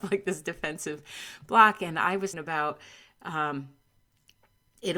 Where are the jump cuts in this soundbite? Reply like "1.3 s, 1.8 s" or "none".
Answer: 2.3 s